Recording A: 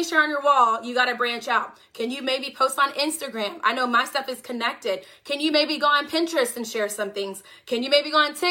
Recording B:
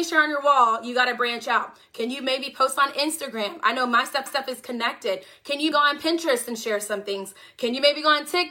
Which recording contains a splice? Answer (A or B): B